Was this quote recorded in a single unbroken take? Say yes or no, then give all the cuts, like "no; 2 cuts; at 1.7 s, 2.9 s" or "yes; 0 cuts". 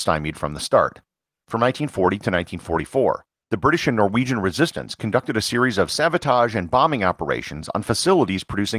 yes; 0 cuts